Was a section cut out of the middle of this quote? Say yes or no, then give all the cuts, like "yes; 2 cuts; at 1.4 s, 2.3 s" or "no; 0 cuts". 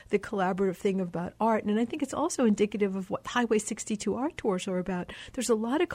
no; 0 cuts